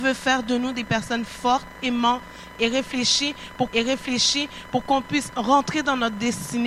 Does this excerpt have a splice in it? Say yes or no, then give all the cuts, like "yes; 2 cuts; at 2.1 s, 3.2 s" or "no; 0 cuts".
yes; 1 cut; at 3.7 s